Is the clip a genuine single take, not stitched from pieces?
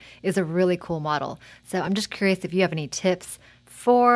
yes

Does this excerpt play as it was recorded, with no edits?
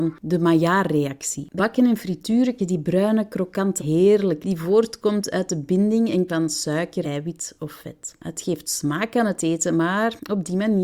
no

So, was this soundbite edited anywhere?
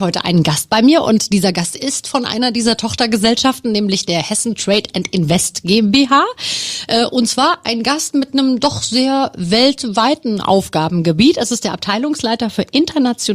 no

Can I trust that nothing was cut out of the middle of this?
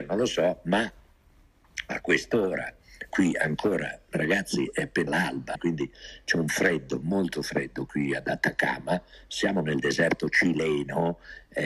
no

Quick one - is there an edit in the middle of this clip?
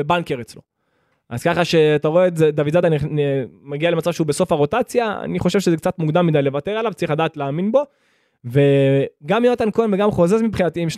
no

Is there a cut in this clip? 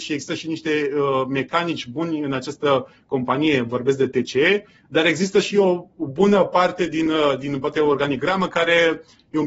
no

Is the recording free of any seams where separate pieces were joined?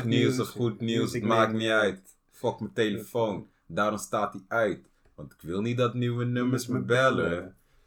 yes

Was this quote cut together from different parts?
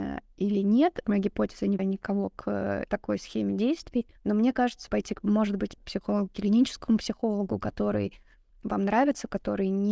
yes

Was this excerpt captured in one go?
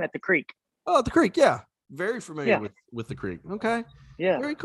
yes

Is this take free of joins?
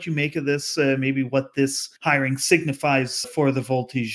no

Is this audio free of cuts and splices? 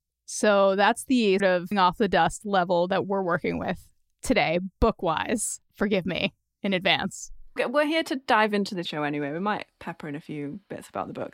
no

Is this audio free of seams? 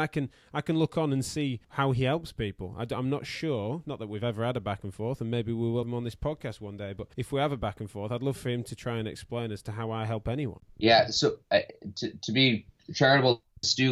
no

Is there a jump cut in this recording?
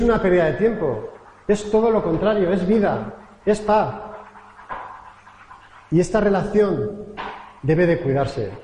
no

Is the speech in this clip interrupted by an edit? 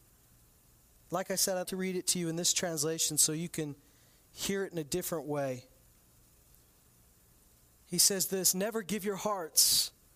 yes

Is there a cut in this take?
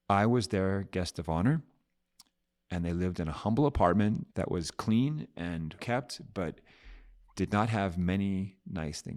yes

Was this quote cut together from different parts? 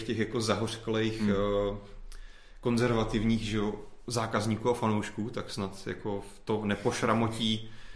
no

